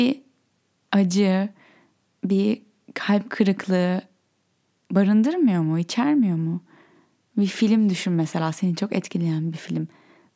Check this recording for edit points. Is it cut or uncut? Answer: uncut